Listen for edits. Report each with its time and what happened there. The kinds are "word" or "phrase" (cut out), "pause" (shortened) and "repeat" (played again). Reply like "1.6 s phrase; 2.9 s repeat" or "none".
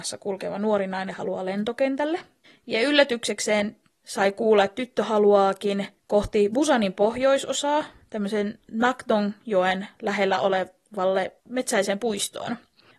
3.9 s pause; 6.0 s pause; 11.4 s pause